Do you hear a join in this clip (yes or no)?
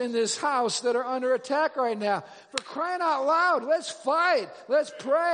no